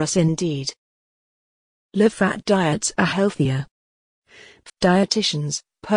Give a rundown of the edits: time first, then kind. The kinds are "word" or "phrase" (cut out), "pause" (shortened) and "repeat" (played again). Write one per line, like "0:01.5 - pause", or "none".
0:04.7 - word